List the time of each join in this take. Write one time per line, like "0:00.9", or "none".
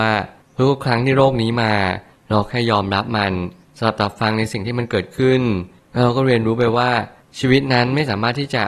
none